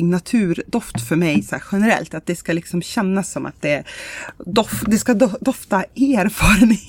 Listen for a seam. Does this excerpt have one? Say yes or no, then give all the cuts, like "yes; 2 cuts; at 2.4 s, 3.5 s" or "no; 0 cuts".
no; 0 cuts